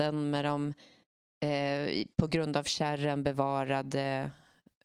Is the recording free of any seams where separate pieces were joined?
yes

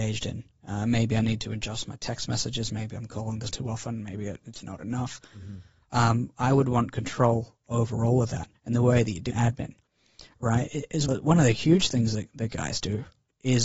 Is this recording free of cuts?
no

